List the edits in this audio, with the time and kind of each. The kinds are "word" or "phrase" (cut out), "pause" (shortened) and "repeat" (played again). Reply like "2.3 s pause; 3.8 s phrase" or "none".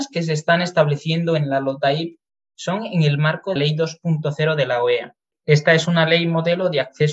3.6 s word